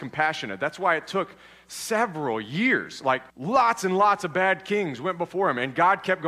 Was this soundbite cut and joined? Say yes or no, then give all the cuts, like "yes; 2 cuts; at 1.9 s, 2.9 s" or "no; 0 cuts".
yes; 1 cut; at 3.3 s